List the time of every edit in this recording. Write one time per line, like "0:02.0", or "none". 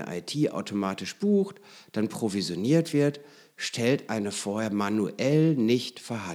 none